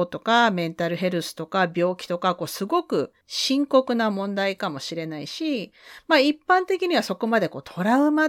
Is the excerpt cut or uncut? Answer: cut